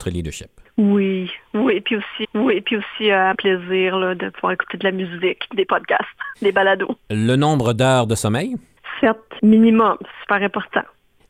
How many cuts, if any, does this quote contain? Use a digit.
5